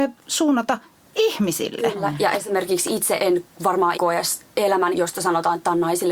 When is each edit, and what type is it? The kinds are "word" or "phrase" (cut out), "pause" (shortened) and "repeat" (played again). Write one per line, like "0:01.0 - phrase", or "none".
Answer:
0:03.2 - word
0:03.9 - word
0:04.9 - phrase

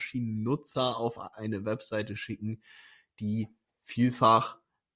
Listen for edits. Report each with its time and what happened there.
none

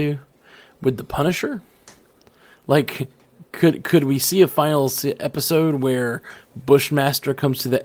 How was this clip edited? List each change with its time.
none

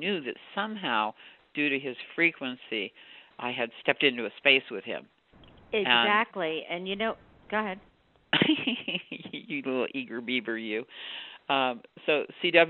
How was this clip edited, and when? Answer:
none

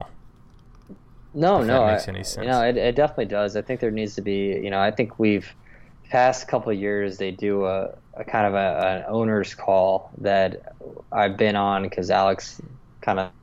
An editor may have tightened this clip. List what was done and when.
0:08.1 - pause

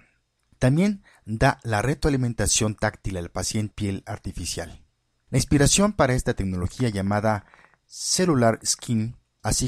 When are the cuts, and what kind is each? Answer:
0:03.7 - word

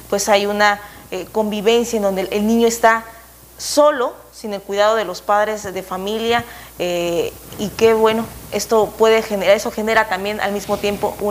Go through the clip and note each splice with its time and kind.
none

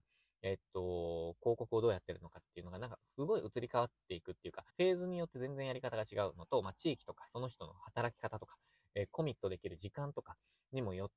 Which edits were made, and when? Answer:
0:04.7 - pause

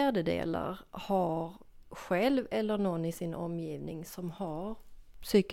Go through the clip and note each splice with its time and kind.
none

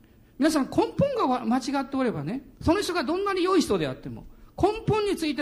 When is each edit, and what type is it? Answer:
0:02.5 - pause

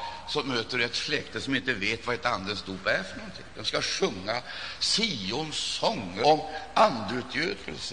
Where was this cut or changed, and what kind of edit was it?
0:06.2 - word

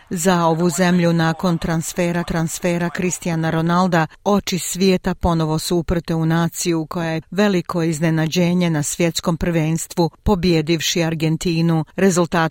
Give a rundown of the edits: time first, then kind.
0:02.3 - repeat
0:07.2 - word

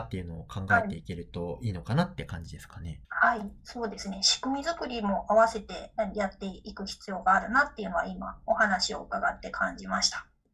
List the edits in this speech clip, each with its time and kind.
0:03.0 - pause

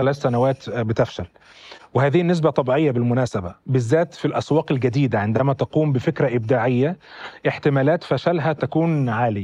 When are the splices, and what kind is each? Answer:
0:03.6 - pause

